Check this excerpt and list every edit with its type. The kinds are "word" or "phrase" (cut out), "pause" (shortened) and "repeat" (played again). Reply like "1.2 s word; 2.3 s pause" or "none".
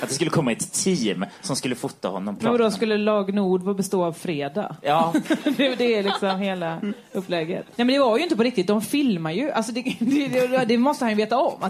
7.7 s pause